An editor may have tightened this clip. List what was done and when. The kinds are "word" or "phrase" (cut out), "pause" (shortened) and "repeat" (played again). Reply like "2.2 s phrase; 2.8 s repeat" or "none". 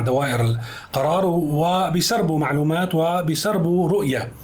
none